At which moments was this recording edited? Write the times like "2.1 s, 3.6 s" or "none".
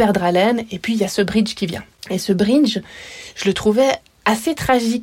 1.9 s